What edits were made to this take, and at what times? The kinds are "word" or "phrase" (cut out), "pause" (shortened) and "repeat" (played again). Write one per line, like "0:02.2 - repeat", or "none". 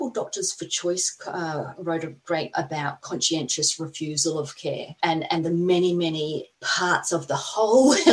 0:02.5 - word

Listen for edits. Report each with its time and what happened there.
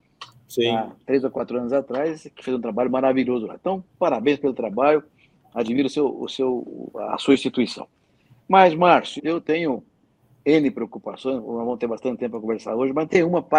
0:09.2 - word

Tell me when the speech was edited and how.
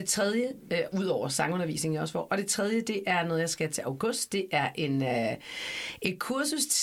none

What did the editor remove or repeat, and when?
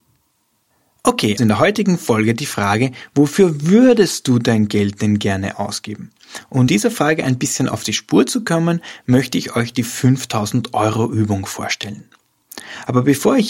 0:01.4 - word
0:06.7 - word

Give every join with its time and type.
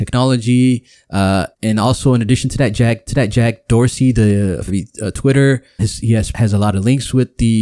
0:01.5 - word
0:03.1 - repeat
0:04.7 - word
0:05.8 - word
0:06.3 - phrase

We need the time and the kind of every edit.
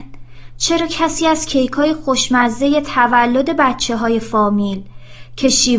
none

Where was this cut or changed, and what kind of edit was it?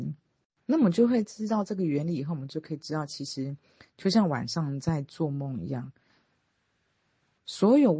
none

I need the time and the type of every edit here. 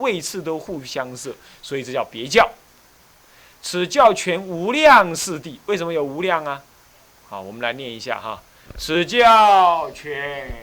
none

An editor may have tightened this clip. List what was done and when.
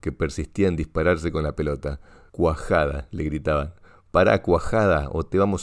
none

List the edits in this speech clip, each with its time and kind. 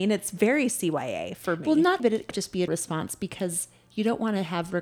0:02.0 - word
0:02.3 - word
0:02.7 - word

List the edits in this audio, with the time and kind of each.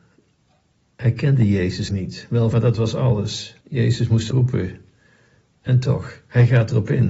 0:01.9 - phrase
0:02.5 - phrase
0:03.6 - pause
0:04.3 - word

